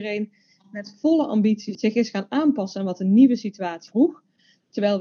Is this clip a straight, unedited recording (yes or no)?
yes